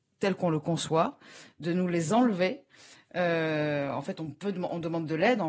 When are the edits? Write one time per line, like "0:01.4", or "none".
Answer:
none